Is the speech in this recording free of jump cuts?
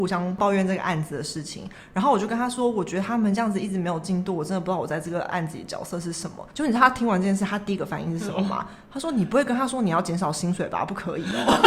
no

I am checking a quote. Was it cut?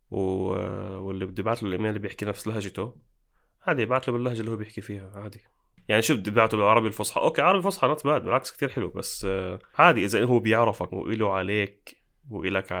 no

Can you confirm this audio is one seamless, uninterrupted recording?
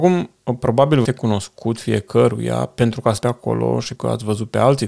no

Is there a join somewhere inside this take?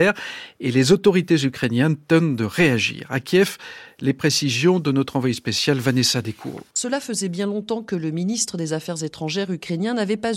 yes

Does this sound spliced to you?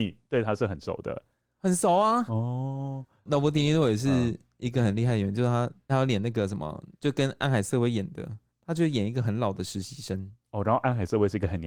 yes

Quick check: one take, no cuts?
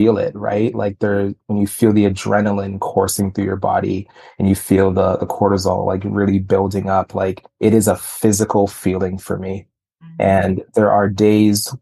yes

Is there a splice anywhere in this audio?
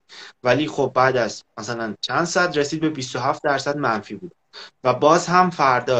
no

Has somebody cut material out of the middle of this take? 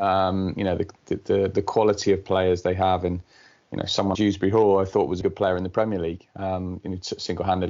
yes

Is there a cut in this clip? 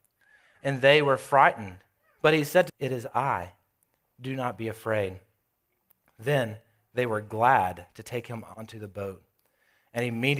yes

